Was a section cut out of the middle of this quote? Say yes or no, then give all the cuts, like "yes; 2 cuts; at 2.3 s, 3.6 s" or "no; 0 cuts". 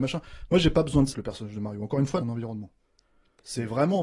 yes; 2 cuts; at 1.1 s, 2.2 s